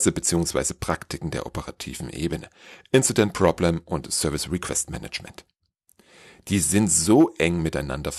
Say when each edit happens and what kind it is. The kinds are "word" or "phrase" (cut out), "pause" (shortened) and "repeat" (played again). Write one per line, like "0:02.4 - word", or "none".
none